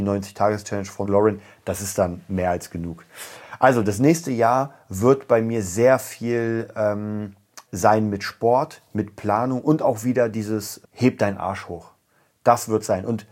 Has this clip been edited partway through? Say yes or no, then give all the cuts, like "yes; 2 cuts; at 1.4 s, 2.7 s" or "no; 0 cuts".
yes; 3 cuts; at 1.0 s, 7.7 s, 10.8 s